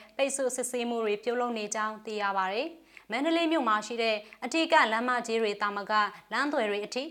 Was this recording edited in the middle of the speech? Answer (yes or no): no